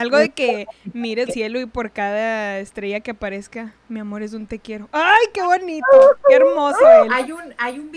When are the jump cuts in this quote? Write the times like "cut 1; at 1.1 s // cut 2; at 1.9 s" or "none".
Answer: cut 1; at 1.3 s